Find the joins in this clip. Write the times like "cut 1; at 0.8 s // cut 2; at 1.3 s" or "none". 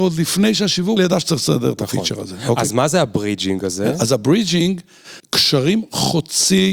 cut 1; at 1.0 s // cut 2; at 5.2 s